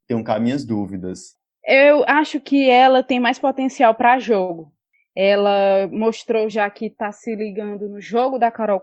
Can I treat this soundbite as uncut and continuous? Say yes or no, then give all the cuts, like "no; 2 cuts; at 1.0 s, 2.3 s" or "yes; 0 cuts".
yes; 0 cuts